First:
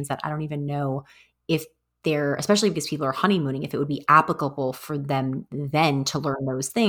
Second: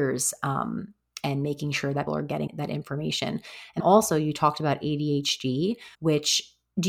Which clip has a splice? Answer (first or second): second